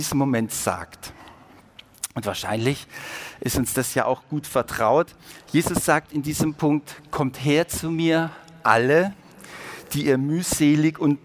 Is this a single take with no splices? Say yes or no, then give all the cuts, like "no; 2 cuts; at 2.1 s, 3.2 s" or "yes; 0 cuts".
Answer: yes; 0 cuts